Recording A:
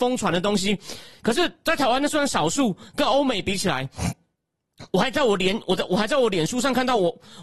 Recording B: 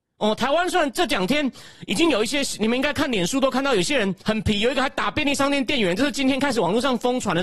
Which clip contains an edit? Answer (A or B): B